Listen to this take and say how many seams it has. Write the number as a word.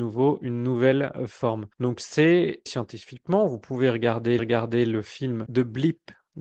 four